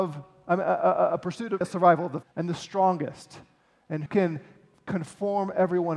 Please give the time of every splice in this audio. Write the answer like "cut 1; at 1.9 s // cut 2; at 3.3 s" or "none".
cut 1; at 1.6 s // cut 2; at 2.2 s // cut 3; at 4.1 s